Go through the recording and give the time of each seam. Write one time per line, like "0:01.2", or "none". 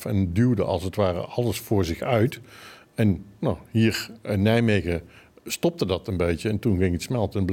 none